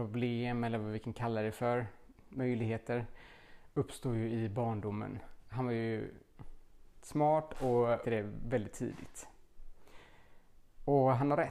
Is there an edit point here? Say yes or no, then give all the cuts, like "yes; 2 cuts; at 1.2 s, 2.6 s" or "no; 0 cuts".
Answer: yes; 1 cut; at 8.0 s